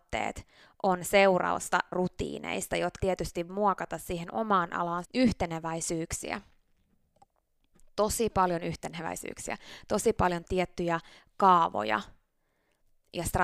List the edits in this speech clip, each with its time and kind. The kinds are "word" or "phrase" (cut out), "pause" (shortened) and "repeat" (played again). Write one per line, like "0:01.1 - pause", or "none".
0:01.9 - word
0:03.0 - word
0:03.5 - word
0:05.0 - phrase